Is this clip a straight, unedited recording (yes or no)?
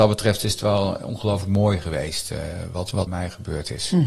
no